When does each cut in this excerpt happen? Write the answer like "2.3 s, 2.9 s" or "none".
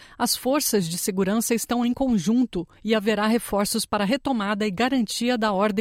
2.8 s